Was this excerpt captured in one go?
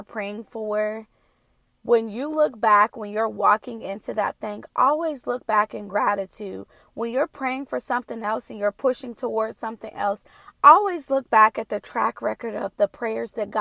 yes; 0 cuts

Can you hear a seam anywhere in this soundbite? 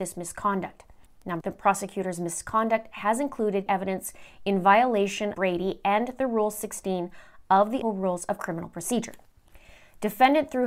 yes; 4 cuts; at 1.4 s, 3.7 s, 5.3 s, 7.8 s

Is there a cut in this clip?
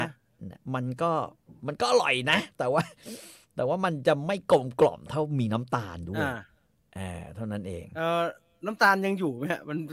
no; 0 cuts

